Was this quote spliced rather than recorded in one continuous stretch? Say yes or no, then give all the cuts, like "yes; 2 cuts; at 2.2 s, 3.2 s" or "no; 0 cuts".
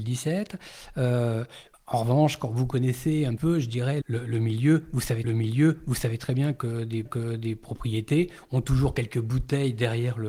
yes; 5 cuts; at 1.7 s, 3.4 s, 4.0 s, 5.2 s, 7.1 s